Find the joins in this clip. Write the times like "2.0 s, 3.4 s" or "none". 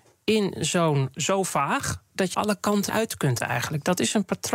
1.1 s, 2.3 s, 2.9 s